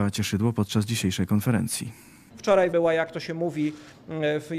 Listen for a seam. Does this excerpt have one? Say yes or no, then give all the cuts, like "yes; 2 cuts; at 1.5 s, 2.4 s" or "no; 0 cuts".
yes; 1 cut; at 2.7 s